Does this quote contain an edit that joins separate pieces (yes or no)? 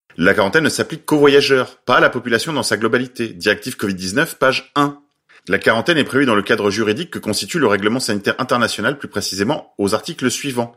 no